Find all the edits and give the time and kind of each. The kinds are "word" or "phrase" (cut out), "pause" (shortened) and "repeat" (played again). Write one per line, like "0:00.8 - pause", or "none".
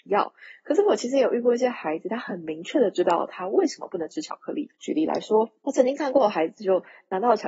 0:04.7 - pause
0:05.6 - pause